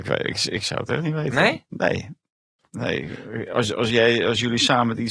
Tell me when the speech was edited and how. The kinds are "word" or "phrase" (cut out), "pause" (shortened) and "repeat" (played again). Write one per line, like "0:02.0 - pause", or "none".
none